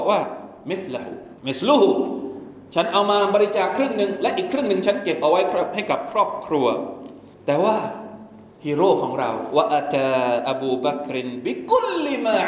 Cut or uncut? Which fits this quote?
cut